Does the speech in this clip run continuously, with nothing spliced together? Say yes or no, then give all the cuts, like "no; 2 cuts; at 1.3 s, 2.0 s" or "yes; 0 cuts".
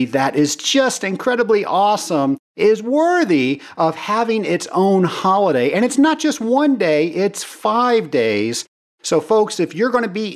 yes; 0 cuts